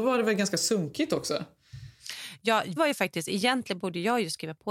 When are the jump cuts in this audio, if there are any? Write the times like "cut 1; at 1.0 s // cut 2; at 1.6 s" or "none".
cut 1; at 2.8 s